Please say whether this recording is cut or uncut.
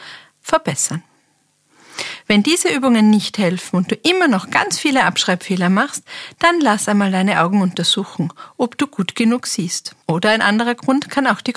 cut